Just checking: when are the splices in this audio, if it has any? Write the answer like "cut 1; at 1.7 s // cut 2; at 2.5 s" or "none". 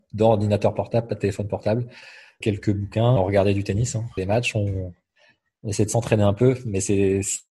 cut 1; at 2.4 s // cut 2; at 3.2 s // cut 3; at 4.2 s